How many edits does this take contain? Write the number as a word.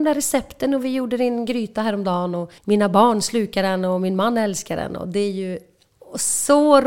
one